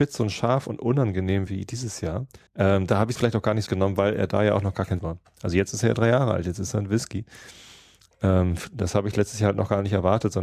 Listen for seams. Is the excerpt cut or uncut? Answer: cut